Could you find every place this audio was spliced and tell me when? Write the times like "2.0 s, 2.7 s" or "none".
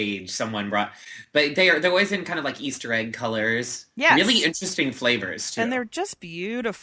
none